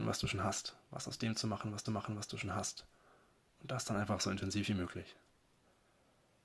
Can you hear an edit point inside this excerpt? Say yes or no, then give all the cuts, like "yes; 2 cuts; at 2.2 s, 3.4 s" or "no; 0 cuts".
yes; 1 cut; at 1.9 s